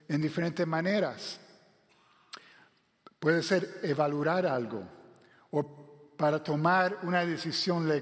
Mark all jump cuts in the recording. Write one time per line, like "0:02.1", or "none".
none